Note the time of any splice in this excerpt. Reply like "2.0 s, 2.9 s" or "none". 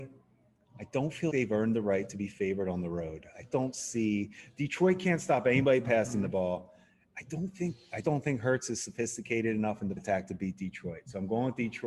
1.3 s, 3.5 s, 8.0 s, 10.0 s